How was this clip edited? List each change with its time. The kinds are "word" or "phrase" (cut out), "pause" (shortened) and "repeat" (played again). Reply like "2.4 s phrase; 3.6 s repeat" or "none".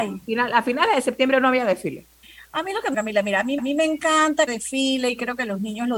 2.2 s pause; 2.9 s phrase; 3.6 s repeat; 4.5 s phrase